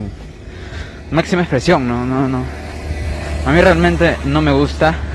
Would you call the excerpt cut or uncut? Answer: uncut